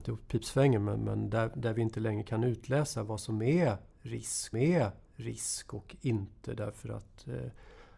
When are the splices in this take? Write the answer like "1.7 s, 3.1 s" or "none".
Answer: 4.5 s